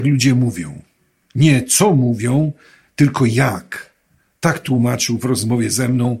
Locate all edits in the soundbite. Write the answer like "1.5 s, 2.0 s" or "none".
none

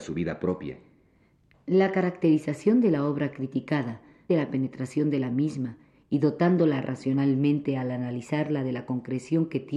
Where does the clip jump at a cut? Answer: 4.3 s

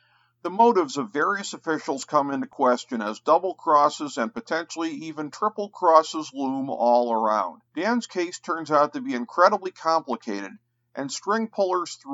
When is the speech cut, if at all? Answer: 7.7 s

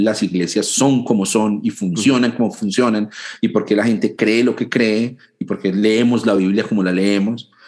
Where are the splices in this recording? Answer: none

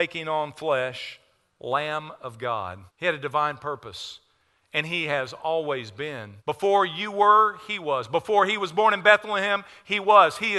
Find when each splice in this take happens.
2.9 s, 6.4 s

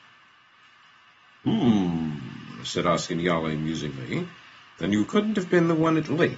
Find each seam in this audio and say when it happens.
none

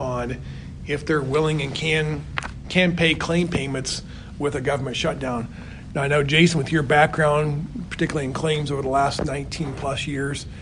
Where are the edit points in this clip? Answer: none

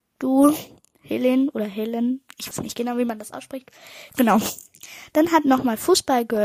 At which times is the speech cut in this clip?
2.5 s

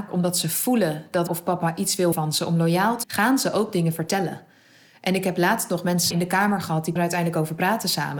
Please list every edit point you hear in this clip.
1.3 s, 2.1 s, 3.0 s, 6.1 s, 7.0 s

